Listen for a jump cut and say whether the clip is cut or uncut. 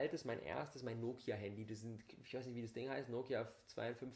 uncut